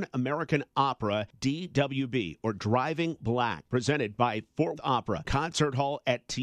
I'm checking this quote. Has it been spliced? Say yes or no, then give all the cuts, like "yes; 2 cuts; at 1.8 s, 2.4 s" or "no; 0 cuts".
yes; 3 cuts; at 3.2 s, 4.8 s, 5.2 s